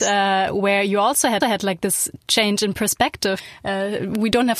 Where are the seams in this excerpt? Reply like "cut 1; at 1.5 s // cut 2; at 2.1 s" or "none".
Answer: cut 1; at 1.4 s